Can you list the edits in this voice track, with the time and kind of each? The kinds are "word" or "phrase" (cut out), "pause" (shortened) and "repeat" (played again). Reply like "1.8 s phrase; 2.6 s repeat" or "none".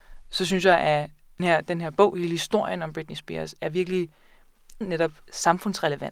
1.4 s word; 4.8 s word